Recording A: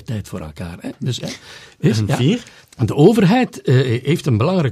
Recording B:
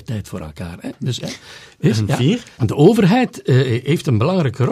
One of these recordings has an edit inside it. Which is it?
B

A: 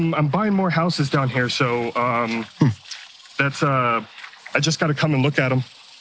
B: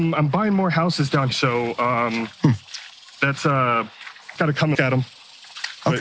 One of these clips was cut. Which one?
B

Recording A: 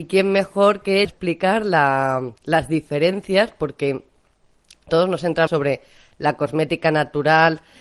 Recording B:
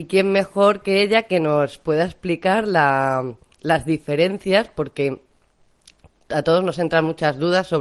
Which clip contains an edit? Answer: A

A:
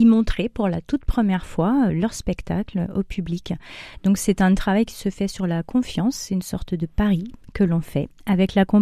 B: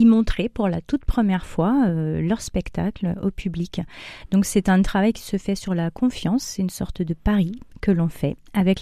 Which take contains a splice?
A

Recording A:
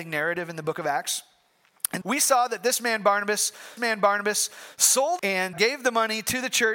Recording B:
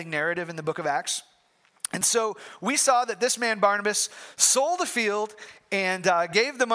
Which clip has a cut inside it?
A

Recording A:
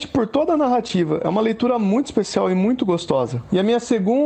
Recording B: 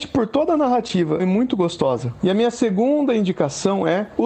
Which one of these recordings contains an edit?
B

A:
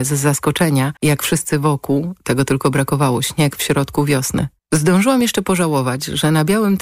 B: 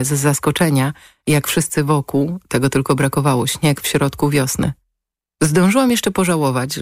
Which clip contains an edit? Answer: A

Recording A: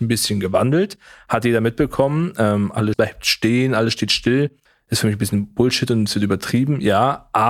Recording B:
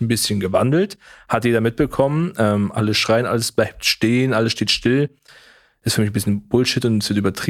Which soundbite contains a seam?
A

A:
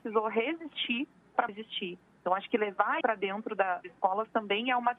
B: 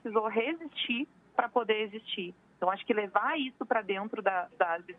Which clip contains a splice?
A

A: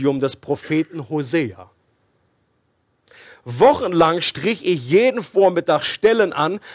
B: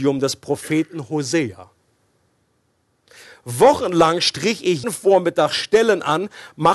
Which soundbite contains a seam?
B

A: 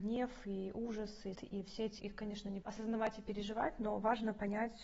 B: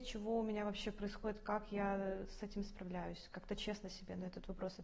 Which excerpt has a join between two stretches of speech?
A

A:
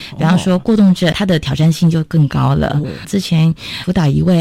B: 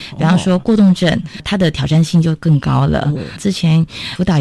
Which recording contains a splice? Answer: A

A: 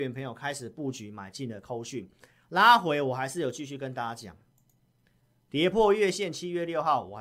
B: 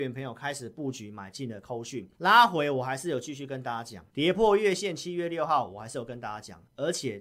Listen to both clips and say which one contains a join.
B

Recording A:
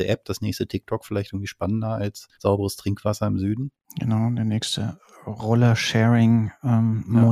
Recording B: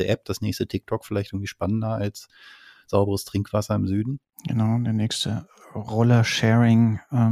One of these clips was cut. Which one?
A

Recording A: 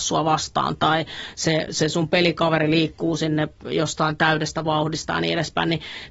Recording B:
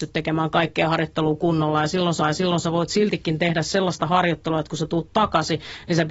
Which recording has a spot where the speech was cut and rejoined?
B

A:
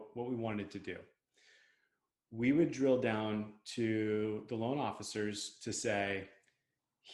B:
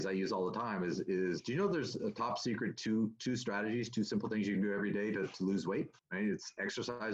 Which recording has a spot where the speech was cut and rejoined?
B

